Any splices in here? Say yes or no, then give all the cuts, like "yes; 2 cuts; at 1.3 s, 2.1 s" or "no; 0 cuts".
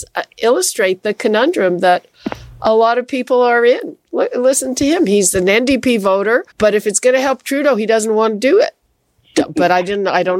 yes; 1 cut; at 6.5 s